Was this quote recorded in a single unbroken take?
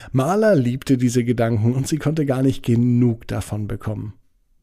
yes; 0 cuts

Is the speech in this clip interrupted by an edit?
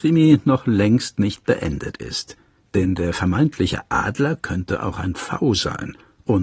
no; 0 cuts

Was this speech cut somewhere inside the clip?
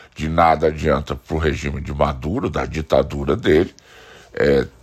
no; 0 cuts

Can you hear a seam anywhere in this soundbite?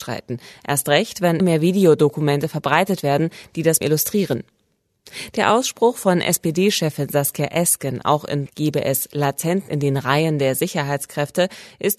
yes; 4 cuts; at 1.4 s, 3.8 s, 8.5 s, 9.7 s

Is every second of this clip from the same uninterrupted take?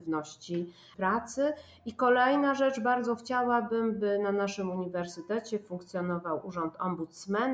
yes; 0 cuts

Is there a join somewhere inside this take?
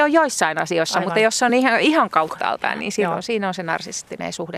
no; 0 cuts

